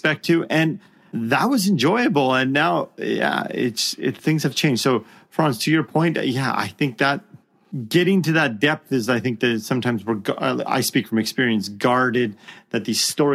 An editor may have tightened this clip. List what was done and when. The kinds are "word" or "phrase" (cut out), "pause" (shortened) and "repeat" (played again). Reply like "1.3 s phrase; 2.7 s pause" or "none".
4.2 s word